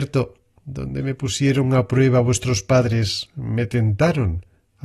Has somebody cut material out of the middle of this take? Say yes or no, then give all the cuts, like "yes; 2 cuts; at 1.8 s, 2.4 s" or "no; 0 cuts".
no; 0 cuts